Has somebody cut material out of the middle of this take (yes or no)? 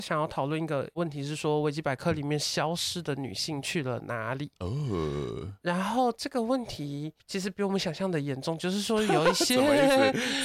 yes